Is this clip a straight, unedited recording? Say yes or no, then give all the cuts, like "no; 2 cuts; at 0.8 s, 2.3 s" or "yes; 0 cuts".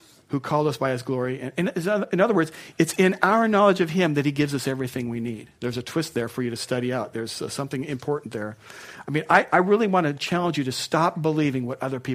no; 1 cut; at 5.6 s